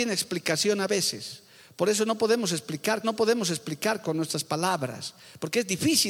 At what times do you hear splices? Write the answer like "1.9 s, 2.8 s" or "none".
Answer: 3.0 s